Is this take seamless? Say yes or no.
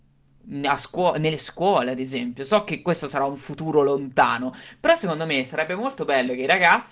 yes